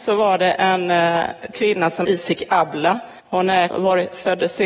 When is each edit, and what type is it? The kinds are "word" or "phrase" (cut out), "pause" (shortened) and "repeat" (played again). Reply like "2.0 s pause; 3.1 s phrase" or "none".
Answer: 1.5 s word; 2.0 s word; 3.2 s pause; 3.7 s word